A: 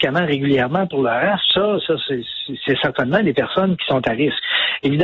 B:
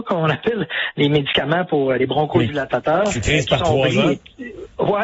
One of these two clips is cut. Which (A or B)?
B